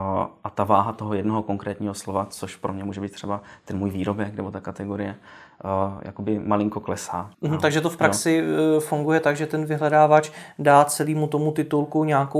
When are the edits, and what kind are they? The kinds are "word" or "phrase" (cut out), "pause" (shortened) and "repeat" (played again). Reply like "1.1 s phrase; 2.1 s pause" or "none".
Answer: 7.3 s pause